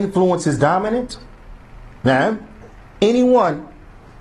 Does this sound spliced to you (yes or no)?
no